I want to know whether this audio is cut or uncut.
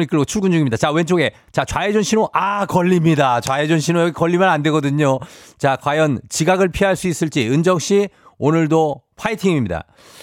uncut